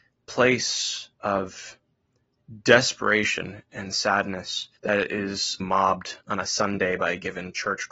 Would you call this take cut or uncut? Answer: cut